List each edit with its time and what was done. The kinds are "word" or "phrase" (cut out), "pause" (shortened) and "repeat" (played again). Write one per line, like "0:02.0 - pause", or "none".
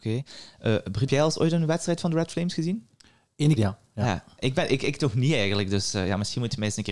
0:01.1 - word
0:03.6 - word